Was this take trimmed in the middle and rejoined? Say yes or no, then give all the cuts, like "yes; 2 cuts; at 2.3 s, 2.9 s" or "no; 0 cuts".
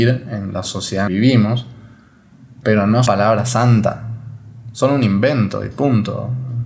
yes; 2 cuts; at 1.1 s, 3.1 s